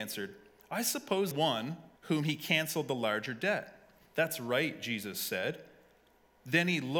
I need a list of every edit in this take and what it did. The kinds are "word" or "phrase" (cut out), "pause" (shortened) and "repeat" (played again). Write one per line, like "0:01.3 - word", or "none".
0:01.3 - word
0:02.0 - pause